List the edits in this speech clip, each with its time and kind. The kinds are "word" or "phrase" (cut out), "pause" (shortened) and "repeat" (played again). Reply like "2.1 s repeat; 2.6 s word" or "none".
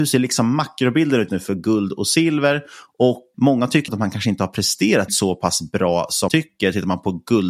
1.3 s word; 3.3 s word; 3.9 s word; 5.1 s word; 6.3 s word